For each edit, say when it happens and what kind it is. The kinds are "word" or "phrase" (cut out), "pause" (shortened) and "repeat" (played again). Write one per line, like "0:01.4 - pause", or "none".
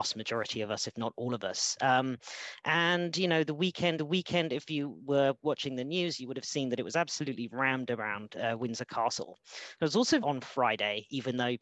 0:04.0 - repeat
0:10.2 - phrase